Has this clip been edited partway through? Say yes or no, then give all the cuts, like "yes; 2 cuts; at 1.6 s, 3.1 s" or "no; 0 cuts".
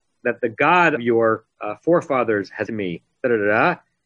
yes; 3 cuts; at 1.0 s, 1.5 s, 2.7 s